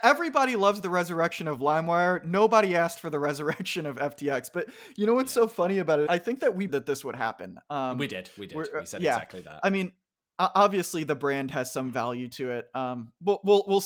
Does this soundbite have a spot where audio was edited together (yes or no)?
yes